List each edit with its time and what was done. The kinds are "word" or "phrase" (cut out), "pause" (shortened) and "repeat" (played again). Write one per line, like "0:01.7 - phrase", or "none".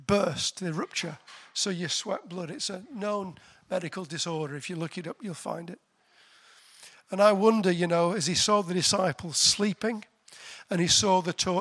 none